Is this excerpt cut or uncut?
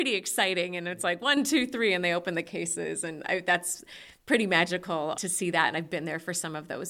cut